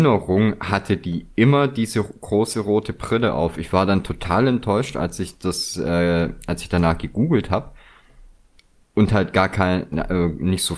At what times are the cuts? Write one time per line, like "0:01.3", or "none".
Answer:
none

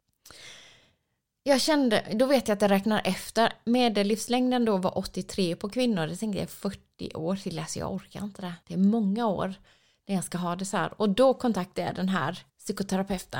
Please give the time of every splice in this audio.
0:08.6
0:12.5

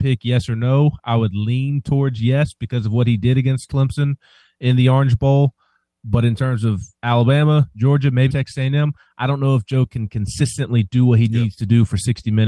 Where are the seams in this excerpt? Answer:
0:08.3

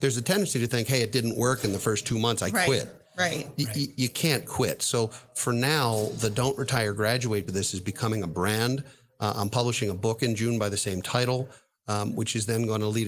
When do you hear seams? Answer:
0:07.5

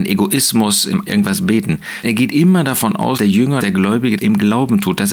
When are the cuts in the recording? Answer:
0:01.1
0:02.0
0:03.2
0:03.6
0:04.2

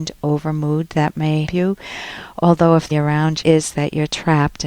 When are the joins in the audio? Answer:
0:01.5
0:02.9
0:03.4

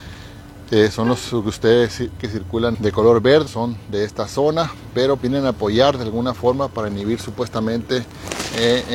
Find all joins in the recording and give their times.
0:02.2
0:02.7
0:03.5
0:05.2

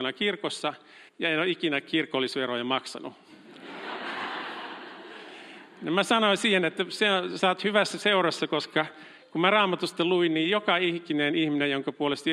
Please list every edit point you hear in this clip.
0:01.1

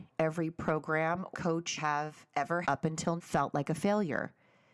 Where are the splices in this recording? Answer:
0:01.3
0:01.8
0:02.6
0:03.2

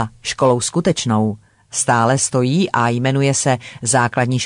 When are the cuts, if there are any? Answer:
none

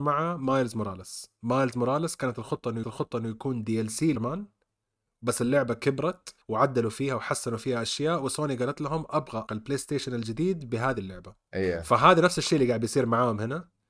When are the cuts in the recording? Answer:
0:02.8
0:04.2
0:06.4
0:09.5

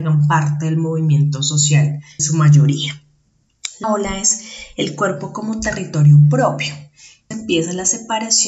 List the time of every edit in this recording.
0:02.2
0:03.8
0:07.3

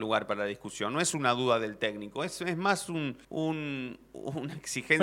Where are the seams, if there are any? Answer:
0:03.2

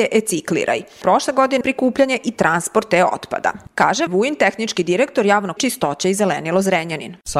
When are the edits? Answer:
0:01.0
0:01.6
0:04.1
0:05.6

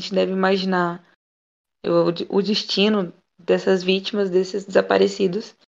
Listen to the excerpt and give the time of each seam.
none

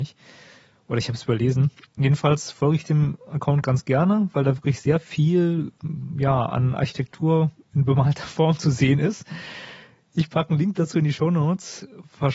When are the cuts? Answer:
none

